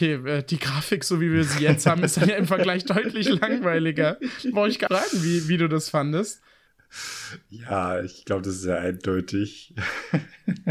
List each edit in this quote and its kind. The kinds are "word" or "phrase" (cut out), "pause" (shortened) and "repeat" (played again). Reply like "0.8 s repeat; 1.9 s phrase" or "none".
4.9 s word